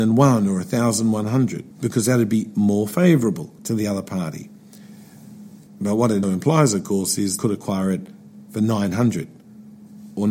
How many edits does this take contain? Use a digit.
5